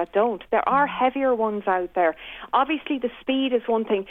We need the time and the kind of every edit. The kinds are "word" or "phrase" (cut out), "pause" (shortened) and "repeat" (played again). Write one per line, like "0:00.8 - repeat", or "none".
none